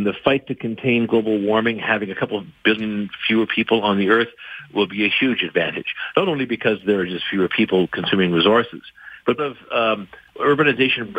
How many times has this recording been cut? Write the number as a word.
one